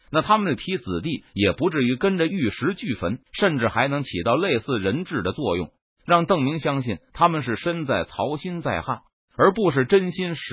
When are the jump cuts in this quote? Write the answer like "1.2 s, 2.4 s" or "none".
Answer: 3.2 s